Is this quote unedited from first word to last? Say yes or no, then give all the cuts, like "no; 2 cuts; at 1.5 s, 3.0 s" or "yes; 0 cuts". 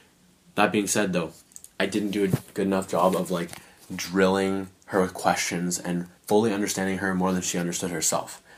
no; 2 cuts; at 1.7 s, 6.2 s